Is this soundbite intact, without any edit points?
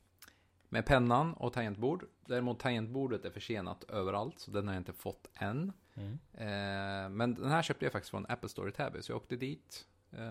no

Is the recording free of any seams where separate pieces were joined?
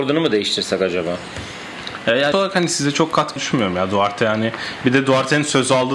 no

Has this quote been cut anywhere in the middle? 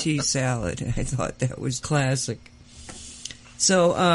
yes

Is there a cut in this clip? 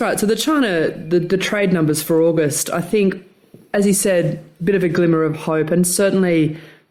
no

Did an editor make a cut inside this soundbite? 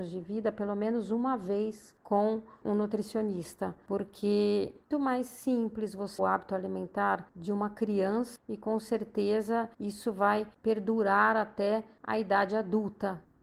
yes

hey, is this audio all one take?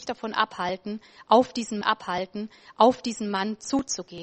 no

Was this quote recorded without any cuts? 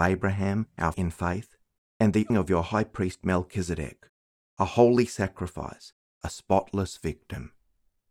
no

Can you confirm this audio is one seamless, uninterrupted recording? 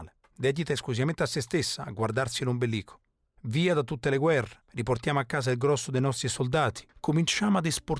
yes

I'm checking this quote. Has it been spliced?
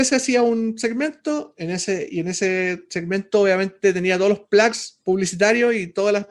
no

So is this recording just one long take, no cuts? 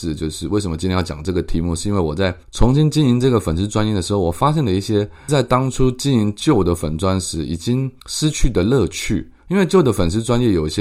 no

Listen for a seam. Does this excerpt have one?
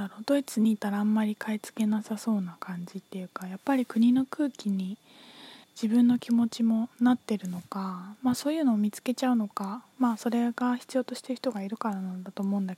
yes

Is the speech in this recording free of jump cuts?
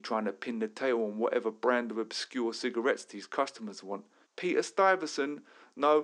no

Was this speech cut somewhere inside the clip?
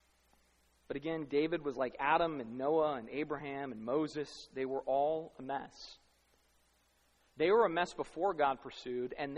no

